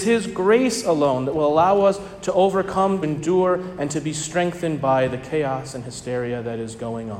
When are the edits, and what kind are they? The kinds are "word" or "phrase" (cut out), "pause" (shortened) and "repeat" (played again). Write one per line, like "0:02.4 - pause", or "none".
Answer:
0:03.0 - word